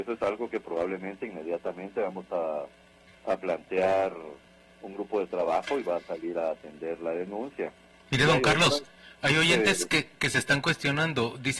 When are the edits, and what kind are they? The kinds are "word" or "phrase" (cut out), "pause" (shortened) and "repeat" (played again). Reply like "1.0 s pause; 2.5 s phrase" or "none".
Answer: none